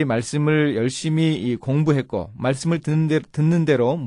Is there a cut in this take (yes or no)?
no